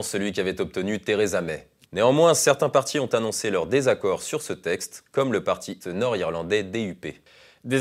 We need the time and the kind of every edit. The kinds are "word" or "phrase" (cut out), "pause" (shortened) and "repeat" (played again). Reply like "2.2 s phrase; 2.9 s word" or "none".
1.8 s pause; 5.8 s word